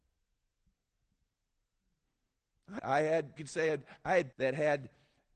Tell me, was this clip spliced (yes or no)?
yes